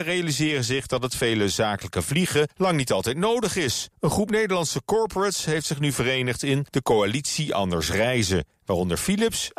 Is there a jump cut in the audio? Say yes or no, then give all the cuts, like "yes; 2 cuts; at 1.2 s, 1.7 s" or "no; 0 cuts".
yes; 1 cut; at 3.9 s